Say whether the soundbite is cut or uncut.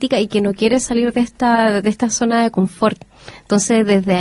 uncut